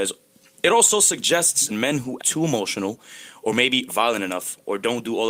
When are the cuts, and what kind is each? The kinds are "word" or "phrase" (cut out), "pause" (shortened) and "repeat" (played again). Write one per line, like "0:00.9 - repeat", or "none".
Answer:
0:01.7 - word
0:02.2 - word
0:03.9 - word